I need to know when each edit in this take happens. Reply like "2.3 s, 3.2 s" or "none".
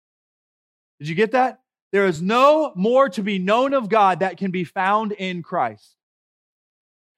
none